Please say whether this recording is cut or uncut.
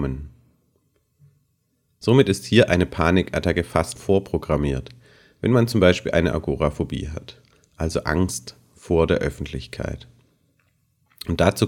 cut